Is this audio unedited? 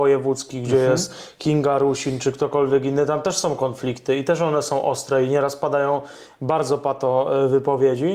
yes; 0 cuts

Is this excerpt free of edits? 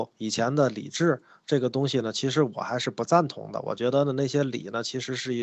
yes; 0 cuts

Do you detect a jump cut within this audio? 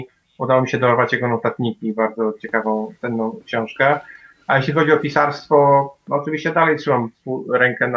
no; 0 cuts

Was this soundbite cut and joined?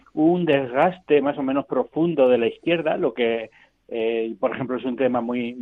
no; 0 cuts

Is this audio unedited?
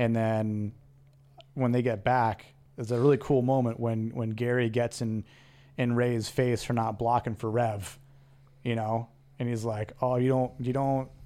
yes; 0 cuts

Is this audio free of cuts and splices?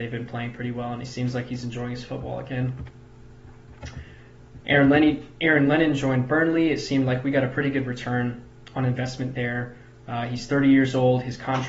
yes; 0 cuts

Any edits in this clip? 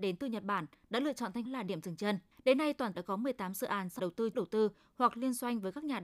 yes; 5 cuts; at 1.4 s, 2.3 s, 2.9 s, 4.0 s, 4.3 s

